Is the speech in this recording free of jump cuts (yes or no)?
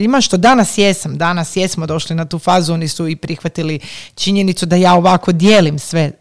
yes